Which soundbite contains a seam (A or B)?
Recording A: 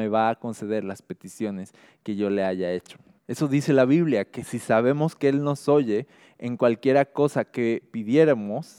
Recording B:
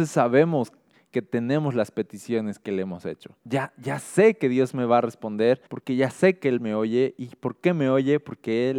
B